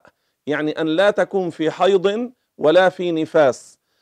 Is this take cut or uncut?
uncut